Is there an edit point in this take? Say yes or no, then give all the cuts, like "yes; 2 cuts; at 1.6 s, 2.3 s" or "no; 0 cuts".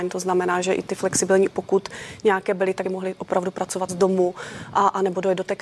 yes; 3 cuts; at 1.5 s, 2.8 s, 3.9 s